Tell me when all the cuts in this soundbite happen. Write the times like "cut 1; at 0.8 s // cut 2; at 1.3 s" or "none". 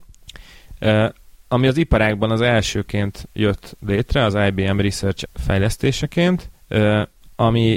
cut 1; at 5.3 s